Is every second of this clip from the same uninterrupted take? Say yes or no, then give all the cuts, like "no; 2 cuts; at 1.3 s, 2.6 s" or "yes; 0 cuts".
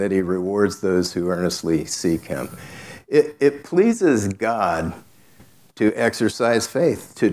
yes; 0 cuts